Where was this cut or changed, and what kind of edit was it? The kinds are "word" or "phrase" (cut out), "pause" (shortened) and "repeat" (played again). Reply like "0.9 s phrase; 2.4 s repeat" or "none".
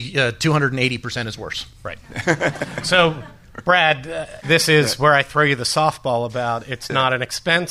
4.4 s phrase